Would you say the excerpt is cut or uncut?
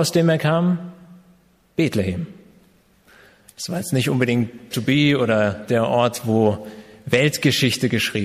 cut